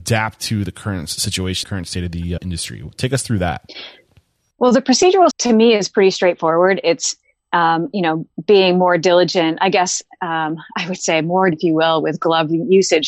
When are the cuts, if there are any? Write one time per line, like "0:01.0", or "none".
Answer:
0:01.6
0:02.4
0:05.3
0:11.5